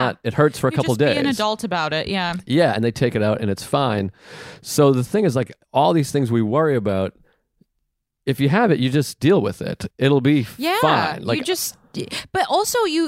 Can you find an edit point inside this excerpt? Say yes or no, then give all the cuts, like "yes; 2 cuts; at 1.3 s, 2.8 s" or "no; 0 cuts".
no; 0 cuts